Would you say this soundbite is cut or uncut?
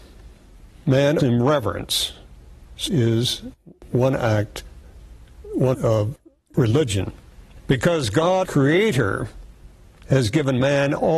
cut